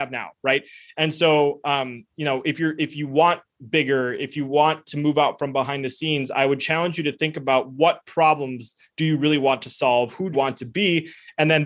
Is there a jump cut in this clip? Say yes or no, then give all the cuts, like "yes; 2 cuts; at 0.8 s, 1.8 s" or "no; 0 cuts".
yes; 1 cut; at 10.3 s